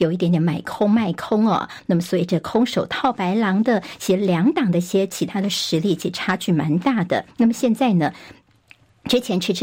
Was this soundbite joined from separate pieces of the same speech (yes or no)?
yes